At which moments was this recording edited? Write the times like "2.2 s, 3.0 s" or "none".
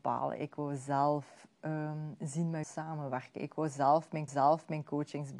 2.6 s, 4.3 s